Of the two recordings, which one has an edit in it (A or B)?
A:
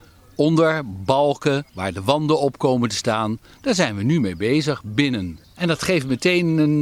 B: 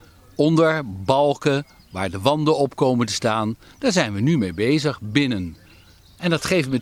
A